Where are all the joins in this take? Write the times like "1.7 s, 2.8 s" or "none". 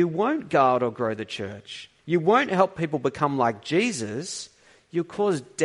2.0 s